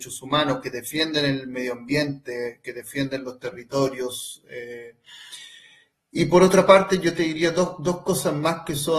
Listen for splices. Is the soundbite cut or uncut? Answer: uncut